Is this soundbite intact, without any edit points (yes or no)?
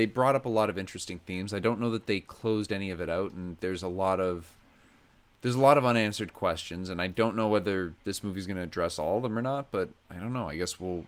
yes